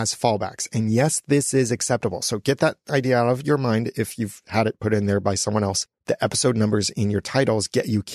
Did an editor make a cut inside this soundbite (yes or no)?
no